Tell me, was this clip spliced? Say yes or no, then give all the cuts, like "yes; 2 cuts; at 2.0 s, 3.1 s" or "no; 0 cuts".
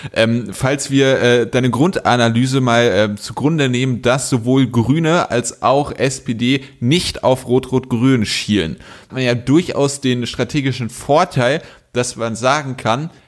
yes; 1 cut; at 9.1 s